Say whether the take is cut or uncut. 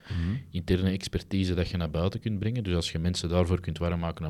uncut